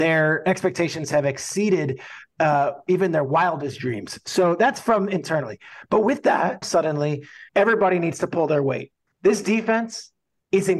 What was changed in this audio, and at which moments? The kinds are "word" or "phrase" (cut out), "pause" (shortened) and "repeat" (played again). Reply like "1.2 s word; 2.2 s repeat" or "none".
6.6 s word; 7.5 s pause; 9.1 s pause

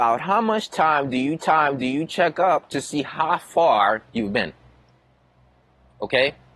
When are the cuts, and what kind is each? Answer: 1.4 s repeat; 4.1 s pause

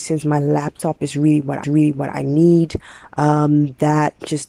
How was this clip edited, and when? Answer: 1.6 s repeat

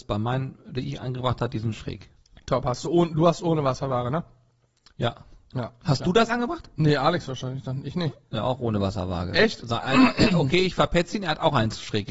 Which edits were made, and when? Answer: none

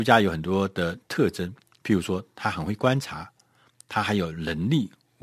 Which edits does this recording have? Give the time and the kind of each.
none

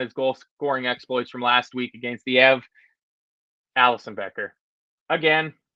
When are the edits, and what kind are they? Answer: none

